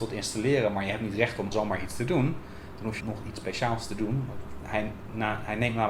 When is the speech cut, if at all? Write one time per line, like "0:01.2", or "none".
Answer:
0:01.5
0:03.0